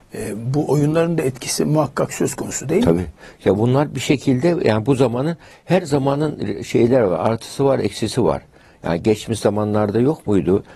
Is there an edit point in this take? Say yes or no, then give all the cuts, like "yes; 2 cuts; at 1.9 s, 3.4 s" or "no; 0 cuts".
no; 0 cuts